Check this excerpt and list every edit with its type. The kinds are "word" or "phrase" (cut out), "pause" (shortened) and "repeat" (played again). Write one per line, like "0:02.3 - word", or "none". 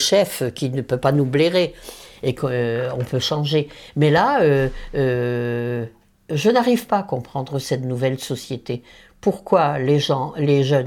none